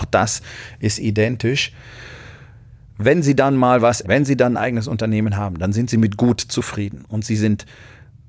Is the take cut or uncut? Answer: cut